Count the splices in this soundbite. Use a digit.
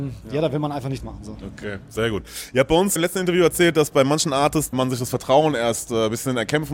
3